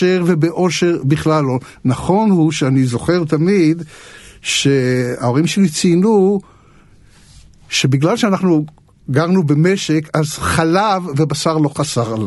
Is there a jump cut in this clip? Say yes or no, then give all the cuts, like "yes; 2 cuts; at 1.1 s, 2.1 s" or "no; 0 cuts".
no; 0 cuts